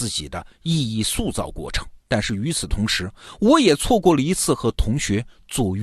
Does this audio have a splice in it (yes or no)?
yes